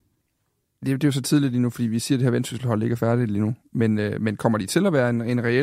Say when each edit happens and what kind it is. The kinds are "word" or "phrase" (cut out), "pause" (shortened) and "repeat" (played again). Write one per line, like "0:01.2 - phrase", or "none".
none